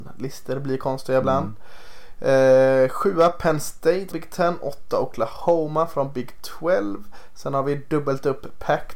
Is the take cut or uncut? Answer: cut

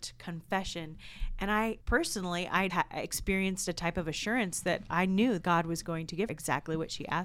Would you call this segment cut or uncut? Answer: cut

